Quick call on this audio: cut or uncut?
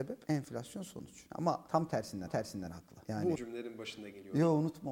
cut